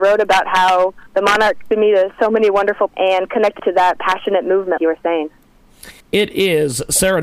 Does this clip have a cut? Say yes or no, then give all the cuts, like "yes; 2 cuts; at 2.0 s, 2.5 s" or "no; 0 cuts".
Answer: yes; 6 cuts; at 1.1 s, 1.7 s, 2.9 s, 3.6 s, 4.8 s, 6.0 s